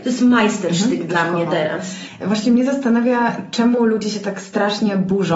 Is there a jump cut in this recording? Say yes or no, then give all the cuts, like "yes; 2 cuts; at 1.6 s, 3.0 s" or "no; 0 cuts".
no; 0 cuts